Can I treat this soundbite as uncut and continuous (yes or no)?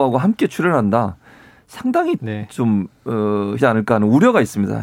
no